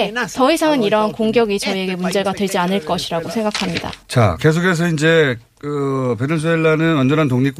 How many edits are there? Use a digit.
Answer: 1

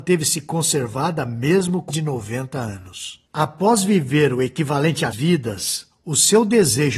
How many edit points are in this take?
3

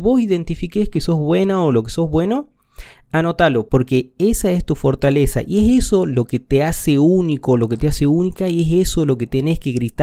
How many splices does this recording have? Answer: 0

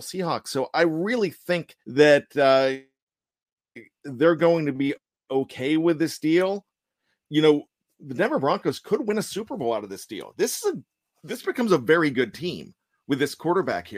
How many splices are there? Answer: 2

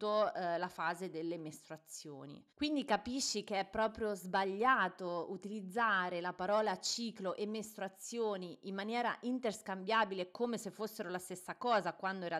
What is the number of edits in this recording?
1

